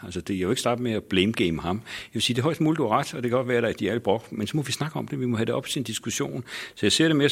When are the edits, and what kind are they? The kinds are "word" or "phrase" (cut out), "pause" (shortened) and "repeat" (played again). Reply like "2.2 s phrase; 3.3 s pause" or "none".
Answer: none